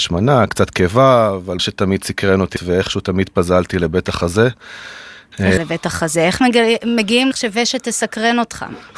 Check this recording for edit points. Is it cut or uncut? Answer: cut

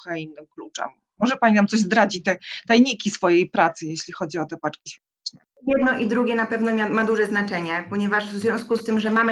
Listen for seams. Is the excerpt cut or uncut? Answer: uncut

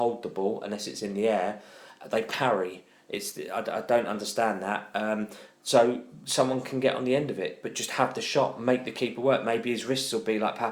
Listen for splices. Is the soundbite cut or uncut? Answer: uncut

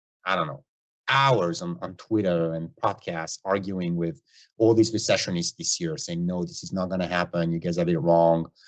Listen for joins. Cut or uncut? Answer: uncut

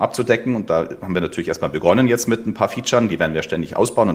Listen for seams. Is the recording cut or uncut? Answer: uncut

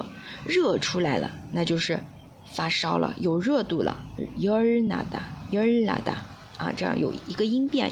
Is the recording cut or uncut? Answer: uncut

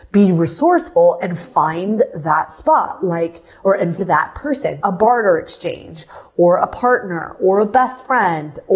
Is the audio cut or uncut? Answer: cut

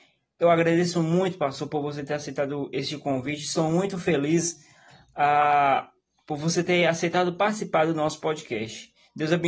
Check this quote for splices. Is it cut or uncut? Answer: uncut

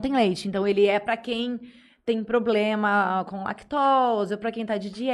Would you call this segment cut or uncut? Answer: uncut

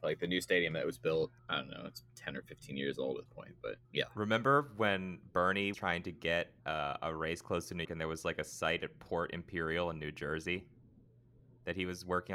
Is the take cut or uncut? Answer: cut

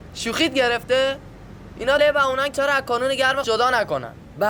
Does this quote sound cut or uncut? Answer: cut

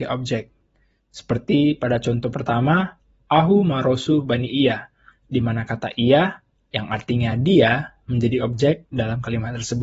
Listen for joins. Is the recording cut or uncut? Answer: uncut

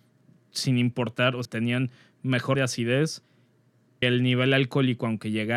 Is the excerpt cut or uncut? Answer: cut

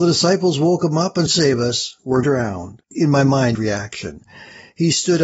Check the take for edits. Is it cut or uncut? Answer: cut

